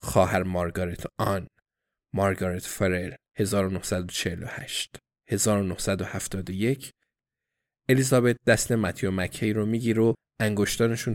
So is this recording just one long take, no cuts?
yes; 0 cuts

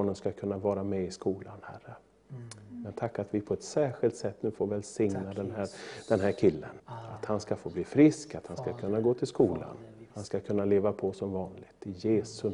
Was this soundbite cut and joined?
yes; 2 cuts; at 6.8 s, 10.1 s

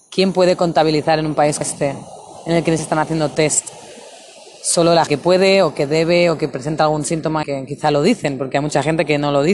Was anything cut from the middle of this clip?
yes; 4 cuts; at 1.6 s, 2.8 s, 5.1 s, 7.4 s

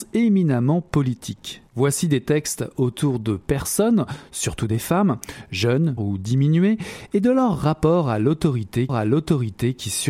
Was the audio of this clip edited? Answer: yes; 3 cuts; at 1.7 s, 6.0 s, 8.9 s

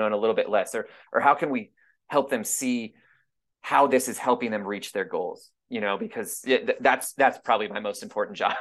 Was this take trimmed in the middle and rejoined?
no; 0 cuts

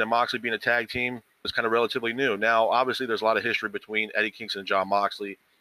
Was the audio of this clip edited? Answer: yes; 1 cut; at 1.4 s

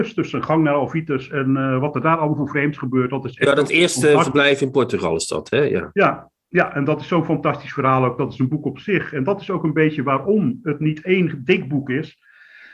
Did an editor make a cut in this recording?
no; 0 cuts

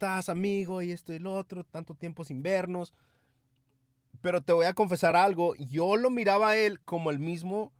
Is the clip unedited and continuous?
yes; 0 cuts

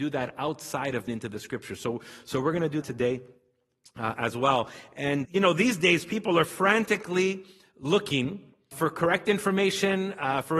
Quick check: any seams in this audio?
yes; 4 cuts; at 1.1 s, 2.8 s, 5.2 s, 8.7 s

